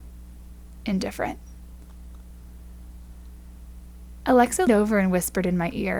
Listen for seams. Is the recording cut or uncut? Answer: cut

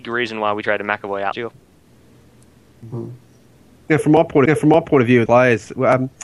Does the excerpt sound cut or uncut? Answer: cut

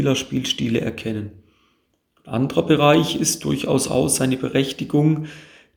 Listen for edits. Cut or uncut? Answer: uncut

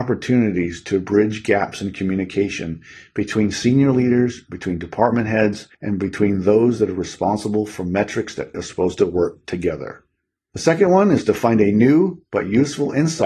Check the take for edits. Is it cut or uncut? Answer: cut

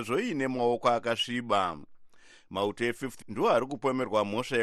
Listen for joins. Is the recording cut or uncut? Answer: cut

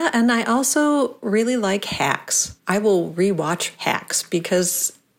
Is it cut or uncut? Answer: cut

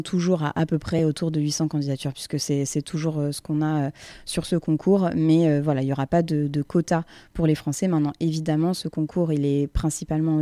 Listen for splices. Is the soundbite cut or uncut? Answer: uncut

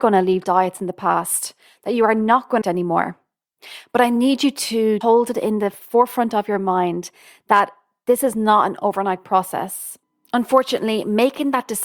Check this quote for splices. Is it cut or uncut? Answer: cut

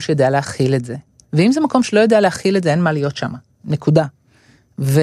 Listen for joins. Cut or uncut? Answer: uncut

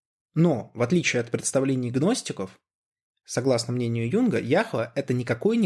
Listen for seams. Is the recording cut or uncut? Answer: uncut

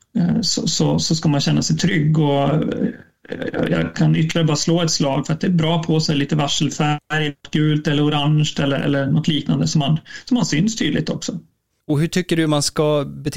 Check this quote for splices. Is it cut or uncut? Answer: uncut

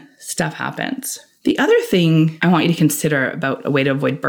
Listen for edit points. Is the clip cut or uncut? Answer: uncut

